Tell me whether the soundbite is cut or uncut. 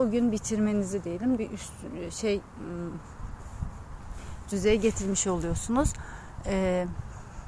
cut